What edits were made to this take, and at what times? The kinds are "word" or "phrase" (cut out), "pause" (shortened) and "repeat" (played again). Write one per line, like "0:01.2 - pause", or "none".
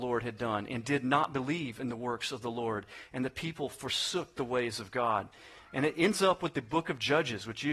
none